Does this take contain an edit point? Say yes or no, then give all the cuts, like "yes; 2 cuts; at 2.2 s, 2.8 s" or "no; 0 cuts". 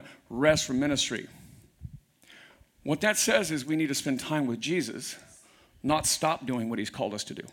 no; 0 cuts